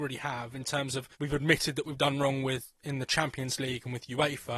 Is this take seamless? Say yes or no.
no